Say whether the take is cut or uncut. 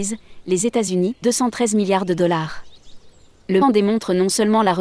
cut